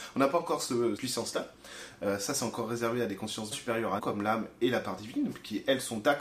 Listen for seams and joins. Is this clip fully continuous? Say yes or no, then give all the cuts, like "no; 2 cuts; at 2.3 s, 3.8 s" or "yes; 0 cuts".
no; 3 cuts; at 1.0 s, 3.5 s, 4.0 s